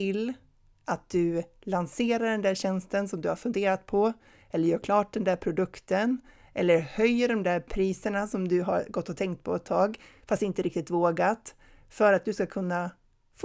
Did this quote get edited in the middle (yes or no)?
no